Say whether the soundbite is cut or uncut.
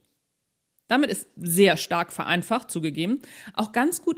uncut